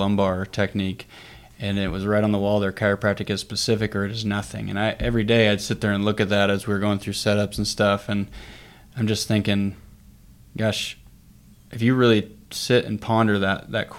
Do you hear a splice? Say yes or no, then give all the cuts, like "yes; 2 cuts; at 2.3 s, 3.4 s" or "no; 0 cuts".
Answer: no; 0 cuts